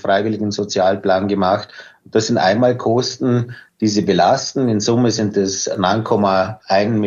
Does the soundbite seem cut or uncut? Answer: uncut